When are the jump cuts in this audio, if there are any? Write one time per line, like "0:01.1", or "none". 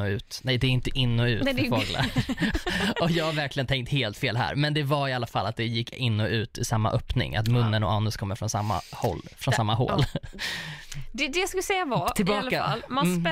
none